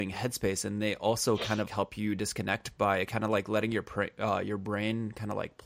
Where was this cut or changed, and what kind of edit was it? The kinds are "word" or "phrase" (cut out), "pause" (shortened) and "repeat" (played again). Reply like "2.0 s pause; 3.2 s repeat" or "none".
1.7 s word